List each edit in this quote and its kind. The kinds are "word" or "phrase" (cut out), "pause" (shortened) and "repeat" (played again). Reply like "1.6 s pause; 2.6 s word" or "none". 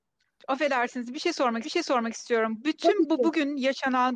1.6 s repeat

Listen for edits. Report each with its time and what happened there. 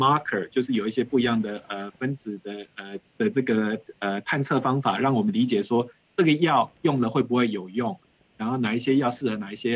3.1 s pause

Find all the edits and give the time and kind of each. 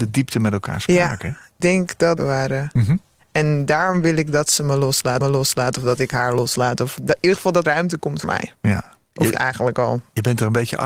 1.6 s phrase; 2.2 s phrase; 3.2 s pause; 5.2 s repeat; 7.6 s word; 8.2 s word; 8.5 s pause; 9.3 s word

